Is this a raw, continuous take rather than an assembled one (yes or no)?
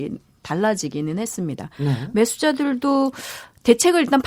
yes